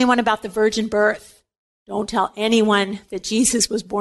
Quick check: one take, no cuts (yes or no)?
yes